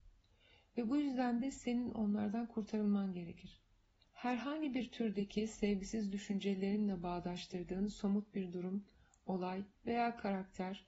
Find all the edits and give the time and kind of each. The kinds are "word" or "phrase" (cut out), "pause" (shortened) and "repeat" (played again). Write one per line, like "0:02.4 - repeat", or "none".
0:09.7 - pause